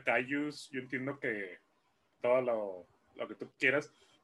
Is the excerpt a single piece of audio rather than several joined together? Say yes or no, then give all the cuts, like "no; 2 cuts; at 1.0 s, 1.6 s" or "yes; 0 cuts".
no; 1 cut; at 2.2 s